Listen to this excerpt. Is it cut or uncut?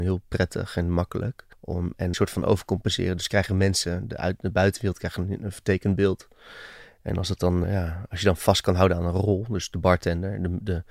cut